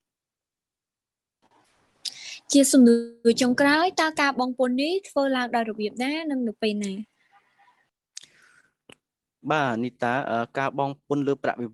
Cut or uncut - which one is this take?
uncut